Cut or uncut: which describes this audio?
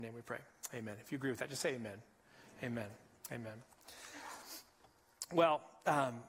uncut